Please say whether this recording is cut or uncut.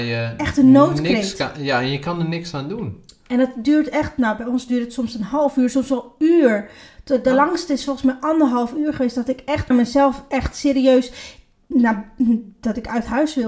cut